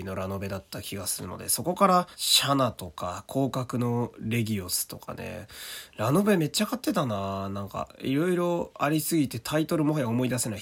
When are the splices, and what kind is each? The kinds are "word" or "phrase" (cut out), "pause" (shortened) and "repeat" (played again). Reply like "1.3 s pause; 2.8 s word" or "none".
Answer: 2.1 s pause

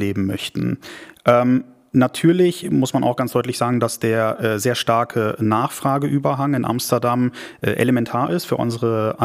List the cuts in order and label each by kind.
none

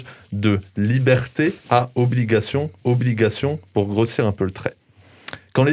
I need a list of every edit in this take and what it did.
1.6 s pause; 2.8 s repeat

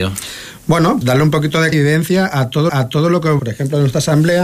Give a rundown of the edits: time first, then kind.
1.0 s word; 1.7 s word; 2.7 s repeat; 3.4 s word

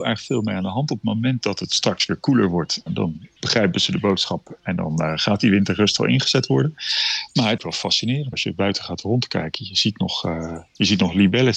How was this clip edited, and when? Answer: 2.9 s word; 3.4 s pause; 7.6 s phrase; 8.3 s word

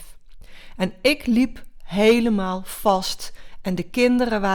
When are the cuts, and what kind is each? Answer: none

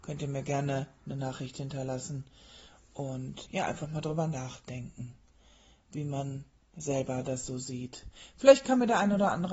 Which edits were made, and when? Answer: 3.5 s word

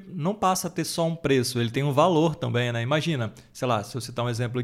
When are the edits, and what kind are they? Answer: none

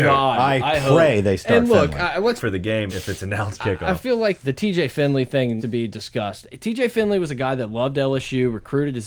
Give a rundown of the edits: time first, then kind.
2.4 s phrase; 2.9 s word; 3.6 s word; 4.4 s word; 5.6 s word

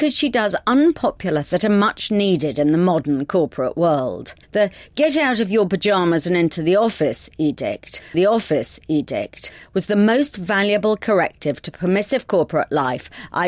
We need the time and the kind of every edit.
1.4 s word; 4.4 s pause; 8.1 s repeat

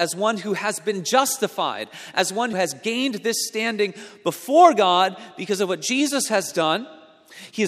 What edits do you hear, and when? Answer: 2.5 s word

